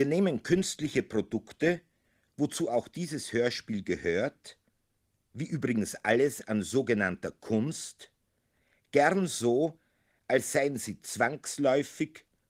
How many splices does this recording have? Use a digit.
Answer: 0